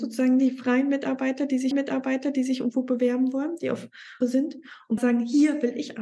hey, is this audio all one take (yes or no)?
no